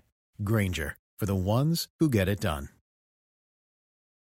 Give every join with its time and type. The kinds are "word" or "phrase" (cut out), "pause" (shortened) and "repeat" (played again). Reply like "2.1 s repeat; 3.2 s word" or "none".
none

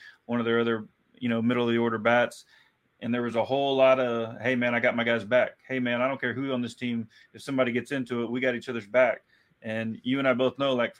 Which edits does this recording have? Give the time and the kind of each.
none

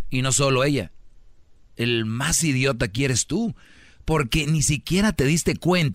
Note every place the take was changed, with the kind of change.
none

